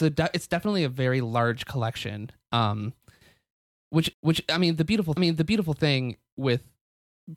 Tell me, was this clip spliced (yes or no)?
yes